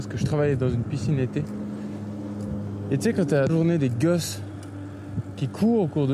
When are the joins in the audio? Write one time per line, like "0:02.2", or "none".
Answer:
0:03.5

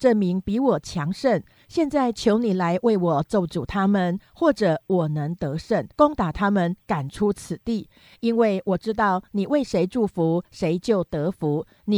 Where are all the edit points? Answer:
0:05.9

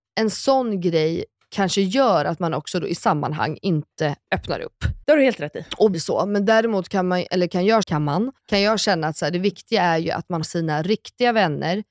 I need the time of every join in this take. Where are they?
0:03.0
0:05.0
0:05.9
0:07.8
0:08.4
0:10.4

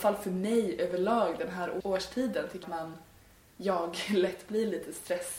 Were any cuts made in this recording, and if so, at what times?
0:01.8
0:02.6

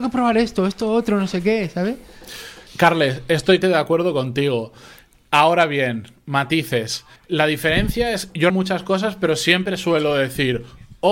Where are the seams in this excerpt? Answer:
0:02.7
0:03.6
0:07.2
0:08.5

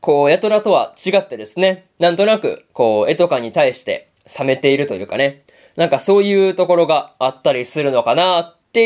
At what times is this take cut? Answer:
none

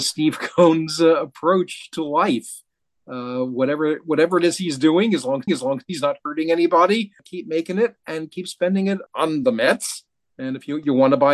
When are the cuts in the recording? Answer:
0:05.5
0:09.1

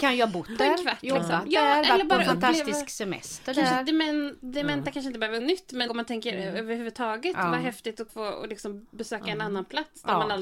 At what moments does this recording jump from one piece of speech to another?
0:05.4
0:05.9
0:08.1

